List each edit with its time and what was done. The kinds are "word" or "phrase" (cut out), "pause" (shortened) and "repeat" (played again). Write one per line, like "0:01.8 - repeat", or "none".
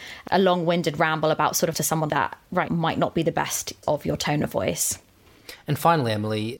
0:01.7 - word
0:02.1 - word
0:02.7 - word
0:03.8 - word